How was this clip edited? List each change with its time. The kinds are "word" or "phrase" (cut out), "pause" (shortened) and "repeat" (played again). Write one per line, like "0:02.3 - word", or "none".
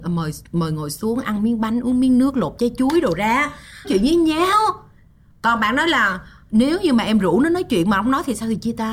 0:03.8 - word